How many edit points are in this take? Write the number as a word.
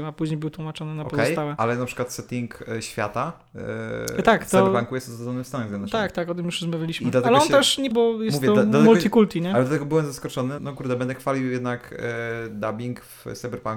two